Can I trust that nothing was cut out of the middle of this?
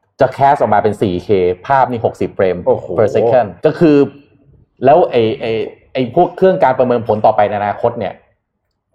no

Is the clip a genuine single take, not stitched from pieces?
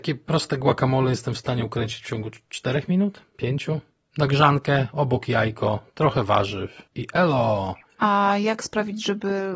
no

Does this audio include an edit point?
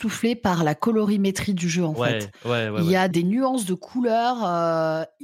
yes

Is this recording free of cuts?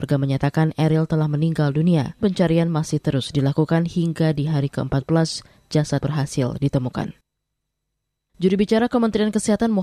no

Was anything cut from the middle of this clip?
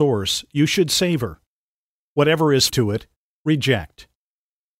yes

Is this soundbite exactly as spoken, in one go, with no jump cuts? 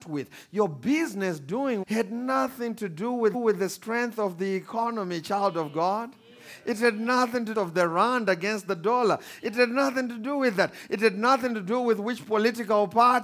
no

